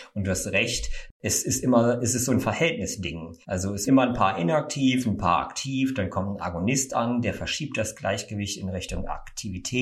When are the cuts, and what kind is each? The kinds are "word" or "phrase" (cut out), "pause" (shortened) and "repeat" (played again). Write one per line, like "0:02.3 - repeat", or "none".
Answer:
0:03.4 - pause
0:03.9 - phrase

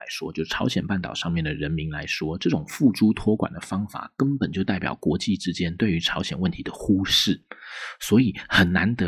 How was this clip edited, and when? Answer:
none

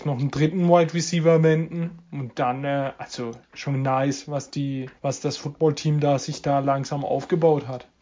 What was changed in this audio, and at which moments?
0:05.0 - pause

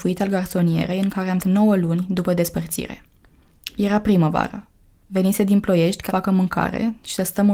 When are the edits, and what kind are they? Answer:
0:01.4 - word
0:06.1 - word

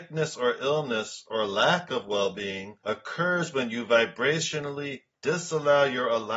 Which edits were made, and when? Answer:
0:02.8 - pause

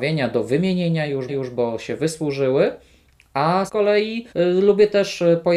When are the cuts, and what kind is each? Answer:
0:01.3 - repeat
0:03.7 - word
0:04.3 - pause

